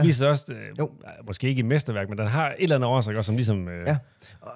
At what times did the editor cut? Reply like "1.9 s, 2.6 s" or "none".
none